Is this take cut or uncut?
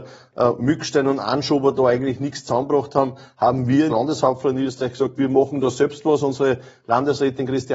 cut